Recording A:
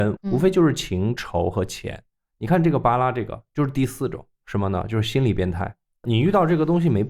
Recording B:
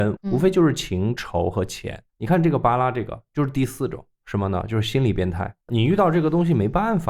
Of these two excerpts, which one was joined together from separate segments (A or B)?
B